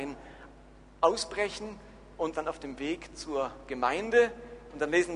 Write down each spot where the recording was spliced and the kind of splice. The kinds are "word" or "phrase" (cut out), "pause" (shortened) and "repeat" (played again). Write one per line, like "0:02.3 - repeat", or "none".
0:02.3 - word